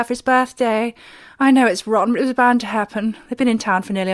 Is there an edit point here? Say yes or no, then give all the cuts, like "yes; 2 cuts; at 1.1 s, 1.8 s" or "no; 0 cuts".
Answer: no; 0 cuts